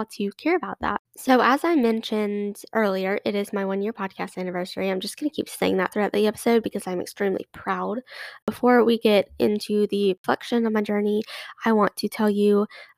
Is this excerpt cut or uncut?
uncut